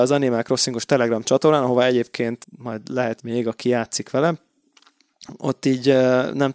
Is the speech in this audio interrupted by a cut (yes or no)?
yes